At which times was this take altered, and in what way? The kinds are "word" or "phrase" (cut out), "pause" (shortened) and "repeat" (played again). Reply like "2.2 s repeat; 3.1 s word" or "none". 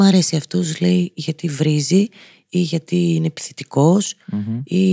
none